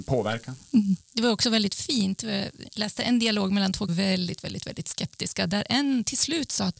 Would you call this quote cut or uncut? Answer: cut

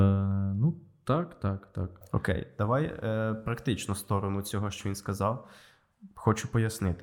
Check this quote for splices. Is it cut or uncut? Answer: uncut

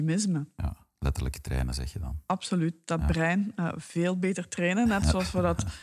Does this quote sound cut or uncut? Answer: uncut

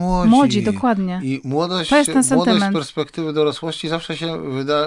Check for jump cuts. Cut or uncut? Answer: uncut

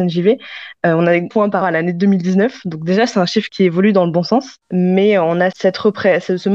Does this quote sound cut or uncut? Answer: cut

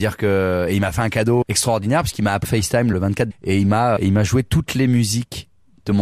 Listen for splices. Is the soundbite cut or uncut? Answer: cut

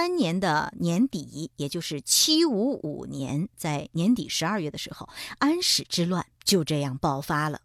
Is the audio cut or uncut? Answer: cut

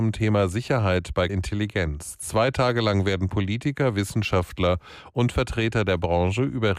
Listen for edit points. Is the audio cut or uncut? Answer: cut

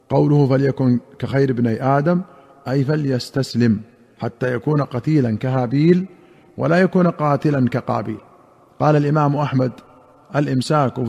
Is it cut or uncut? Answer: uncut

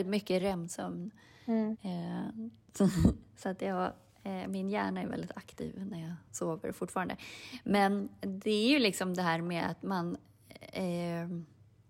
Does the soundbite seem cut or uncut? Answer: uncut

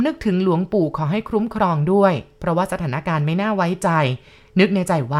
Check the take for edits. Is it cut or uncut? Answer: uncut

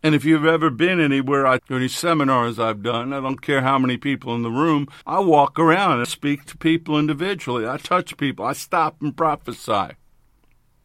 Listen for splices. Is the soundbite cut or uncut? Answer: cut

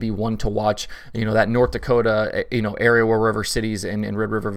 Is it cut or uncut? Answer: uncut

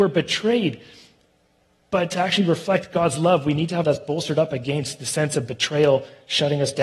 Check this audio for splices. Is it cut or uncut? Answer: cut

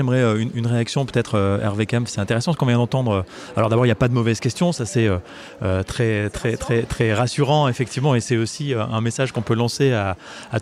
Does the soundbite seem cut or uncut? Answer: uncut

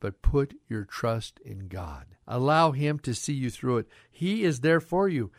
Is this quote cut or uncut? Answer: cut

